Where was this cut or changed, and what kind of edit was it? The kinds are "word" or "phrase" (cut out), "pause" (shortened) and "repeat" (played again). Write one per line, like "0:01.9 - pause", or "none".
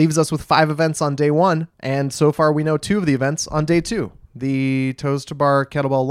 0:01.7 - pause